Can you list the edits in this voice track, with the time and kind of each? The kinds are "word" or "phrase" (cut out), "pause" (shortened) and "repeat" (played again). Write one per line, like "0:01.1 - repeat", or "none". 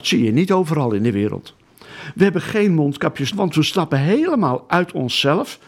0:03.3 - word